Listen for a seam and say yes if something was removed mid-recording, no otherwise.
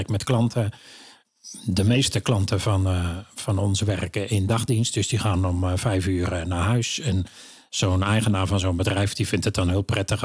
no